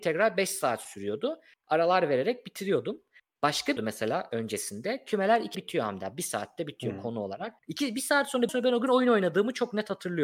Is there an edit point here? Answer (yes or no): yes